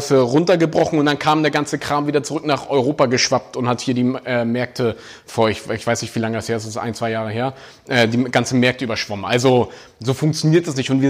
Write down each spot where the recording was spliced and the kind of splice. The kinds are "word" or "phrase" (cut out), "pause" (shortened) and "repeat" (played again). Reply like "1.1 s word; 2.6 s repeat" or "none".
none

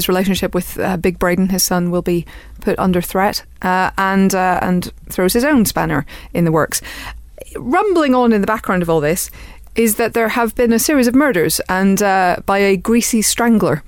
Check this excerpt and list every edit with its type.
none

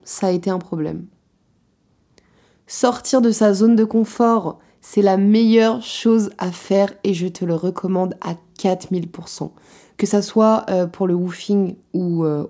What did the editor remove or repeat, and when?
none

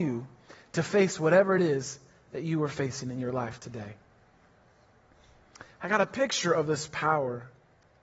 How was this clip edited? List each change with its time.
none

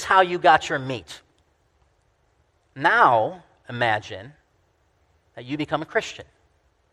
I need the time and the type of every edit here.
none

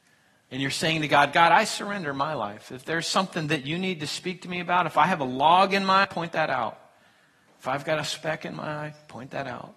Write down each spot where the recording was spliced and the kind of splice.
6.0 s word

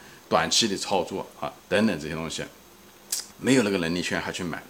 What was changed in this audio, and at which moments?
1.6 s pause; 3.3 s pause

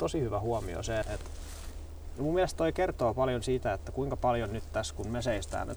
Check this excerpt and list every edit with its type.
1.0 s word

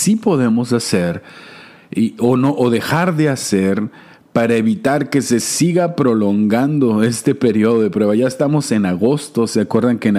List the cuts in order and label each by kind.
none

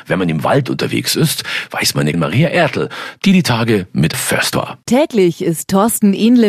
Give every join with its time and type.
2.1 s word; 4.1 s word; 4.5 s word

